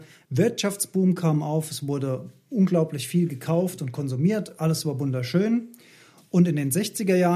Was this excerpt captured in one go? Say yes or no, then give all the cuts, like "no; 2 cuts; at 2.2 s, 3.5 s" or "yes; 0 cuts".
yes; 0 cuts